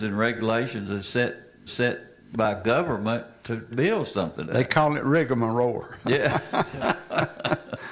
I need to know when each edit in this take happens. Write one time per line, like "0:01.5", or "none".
0:01.7
0:03.7
0:04.4